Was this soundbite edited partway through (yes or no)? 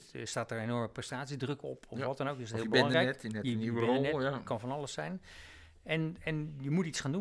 no